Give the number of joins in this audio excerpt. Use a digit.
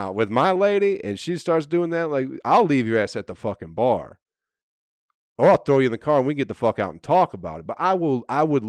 0